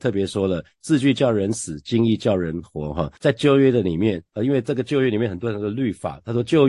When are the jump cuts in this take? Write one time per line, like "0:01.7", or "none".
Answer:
0:03.2